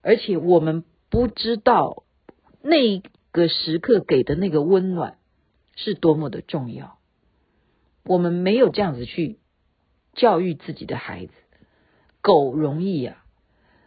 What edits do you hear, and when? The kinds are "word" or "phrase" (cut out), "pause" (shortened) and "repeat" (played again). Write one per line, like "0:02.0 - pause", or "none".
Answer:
none

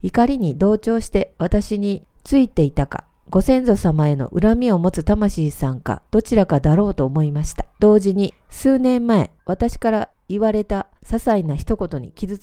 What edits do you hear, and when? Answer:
0:06.1 - pause
0:07.7 - pause
0:09.4 - pause
0:11.0 - pause

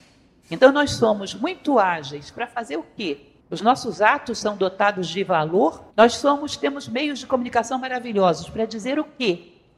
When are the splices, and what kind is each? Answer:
0:03.4 - pause
0:05.9 - pause

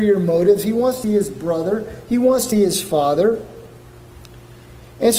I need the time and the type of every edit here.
0:01.0 - word
0:02.5 - word

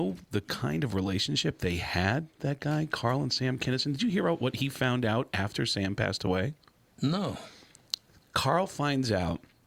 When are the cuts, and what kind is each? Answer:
none

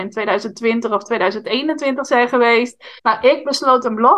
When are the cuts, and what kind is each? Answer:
0:03.0 - pause

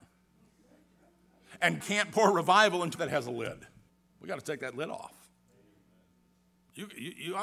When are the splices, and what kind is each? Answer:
0:01.8 - word
0:03.0 - phrase
0:03.9 - pause

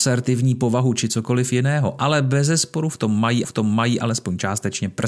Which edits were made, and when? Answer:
0:03.4 - repeat

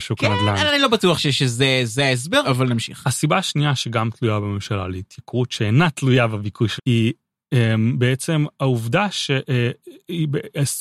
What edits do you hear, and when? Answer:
0:01.2 - word
0:02.4 - word
0:06.8 - word

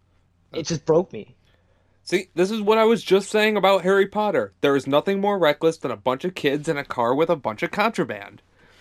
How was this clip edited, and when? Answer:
none

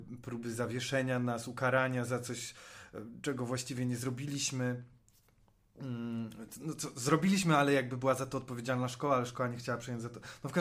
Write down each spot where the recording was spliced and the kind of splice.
none

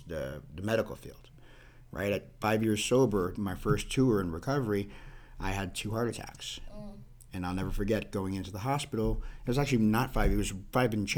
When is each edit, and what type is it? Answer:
0:03.3 - word

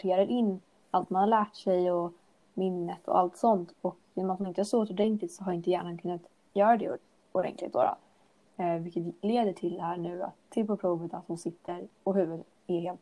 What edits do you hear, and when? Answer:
none

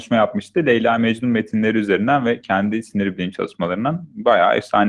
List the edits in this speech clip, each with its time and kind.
none

